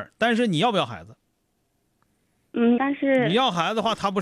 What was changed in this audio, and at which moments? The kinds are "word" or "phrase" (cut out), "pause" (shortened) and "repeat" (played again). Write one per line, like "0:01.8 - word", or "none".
0:02.8 - phrase

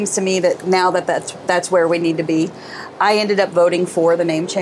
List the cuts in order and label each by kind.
0:01.5 - phrase

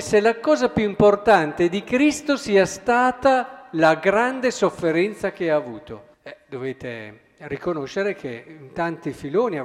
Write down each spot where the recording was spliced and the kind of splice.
0:06.1 - pause

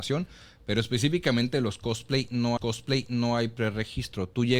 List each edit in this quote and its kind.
0:02.6 - repeat

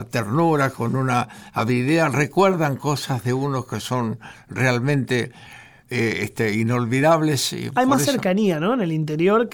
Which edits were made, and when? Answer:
none

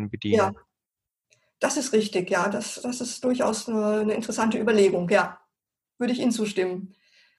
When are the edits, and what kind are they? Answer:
none

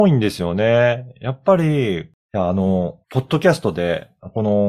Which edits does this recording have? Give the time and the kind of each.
0:03.0 - pause

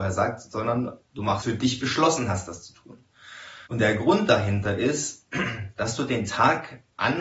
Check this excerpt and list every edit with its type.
0:01.4 - phrase
0:03.7 - pause

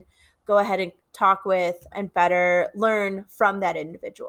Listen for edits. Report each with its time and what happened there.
0:01.9 - word

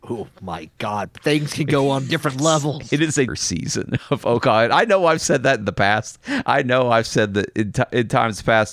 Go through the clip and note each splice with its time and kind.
0:03.3 - phrase

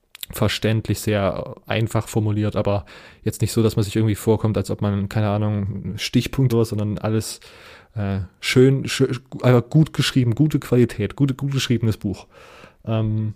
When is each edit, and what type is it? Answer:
0:06.5 - phrase

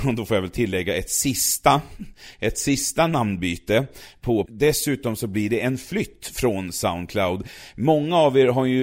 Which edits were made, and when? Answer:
0:04.5 - phrase

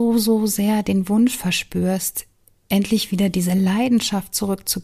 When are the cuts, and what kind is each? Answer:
none

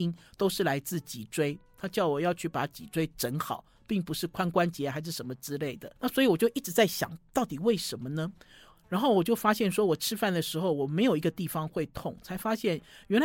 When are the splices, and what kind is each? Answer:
0:06.0 - pause

